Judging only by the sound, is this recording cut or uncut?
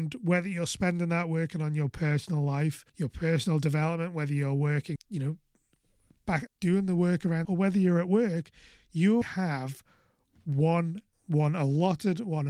cut